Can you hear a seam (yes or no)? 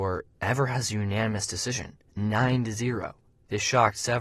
no